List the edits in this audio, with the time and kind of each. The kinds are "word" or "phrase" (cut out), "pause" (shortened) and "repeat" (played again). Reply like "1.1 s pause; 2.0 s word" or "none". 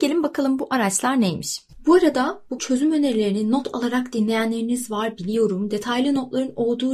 2.6 s word

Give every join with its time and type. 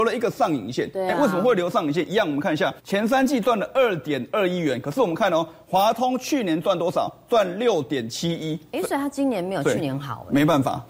2.8 s pause

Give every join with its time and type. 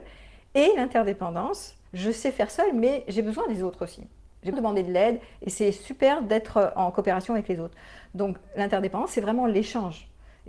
1.9 s pause; 4.5 s word

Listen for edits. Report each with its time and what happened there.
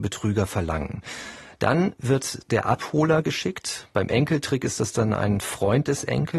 none

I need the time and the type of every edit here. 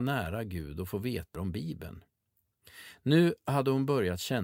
1.4 s word

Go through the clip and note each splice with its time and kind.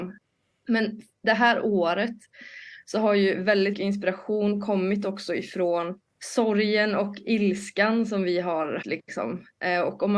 3.7 s word; 6.1 s pause; 8.8 s word

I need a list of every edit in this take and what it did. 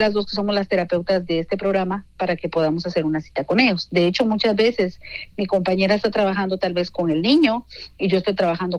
6.9 s word

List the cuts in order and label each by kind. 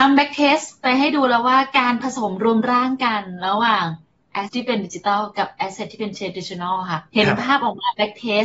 4.5 s word; 7.1 s pause

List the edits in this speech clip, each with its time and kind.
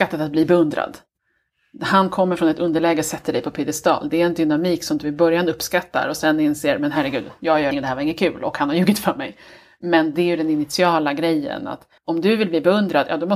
7.7 s word; 12.0 s pause

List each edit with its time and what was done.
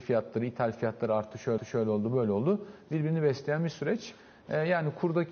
1.6 s repeat

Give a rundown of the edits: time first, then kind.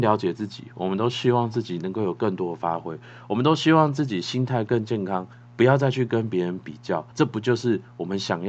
7.1 s pause

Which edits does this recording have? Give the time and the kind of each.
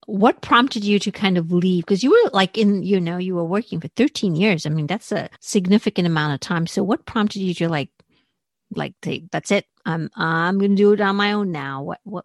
5.4 s pause

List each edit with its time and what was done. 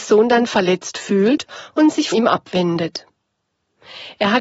2.1 s word

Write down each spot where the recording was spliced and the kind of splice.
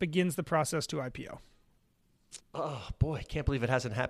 2.4 s pause

